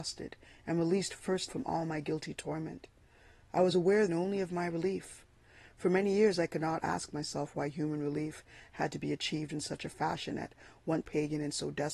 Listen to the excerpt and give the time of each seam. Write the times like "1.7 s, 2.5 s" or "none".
1.2 s, 1.5 s, 4.1 s, 11.0 s